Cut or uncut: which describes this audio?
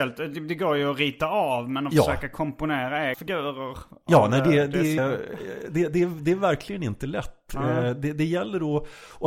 cut